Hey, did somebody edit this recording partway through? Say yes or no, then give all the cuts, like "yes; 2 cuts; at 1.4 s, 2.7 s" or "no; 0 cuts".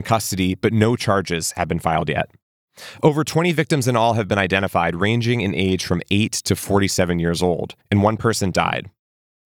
yes; 1 cut; at 7.8 s